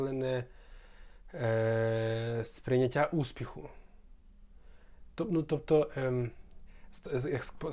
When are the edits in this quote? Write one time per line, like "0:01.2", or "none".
none